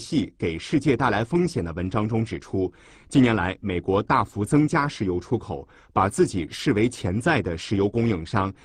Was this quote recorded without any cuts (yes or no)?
yes